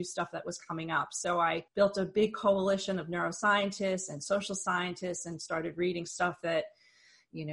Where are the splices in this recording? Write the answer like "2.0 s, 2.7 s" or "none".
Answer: 1.7 s